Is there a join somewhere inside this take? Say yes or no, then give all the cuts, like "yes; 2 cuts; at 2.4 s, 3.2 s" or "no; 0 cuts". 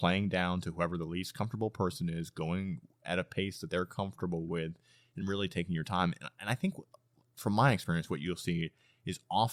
no; 0 cuts